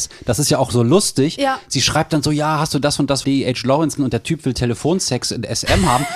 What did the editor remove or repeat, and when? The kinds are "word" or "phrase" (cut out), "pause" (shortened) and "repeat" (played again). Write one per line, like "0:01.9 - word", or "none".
0:03.2 - word
0:04.0 - word